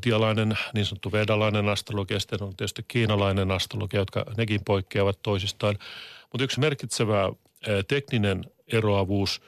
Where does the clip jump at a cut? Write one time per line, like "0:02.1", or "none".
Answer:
0:06.6